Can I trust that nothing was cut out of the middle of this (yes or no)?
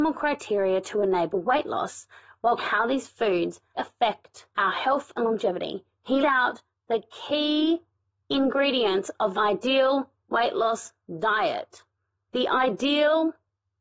no